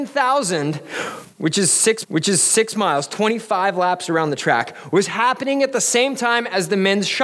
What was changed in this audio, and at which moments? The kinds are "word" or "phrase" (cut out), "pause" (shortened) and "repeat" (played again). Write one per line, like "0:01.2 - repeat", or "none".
0:02.0 - repeat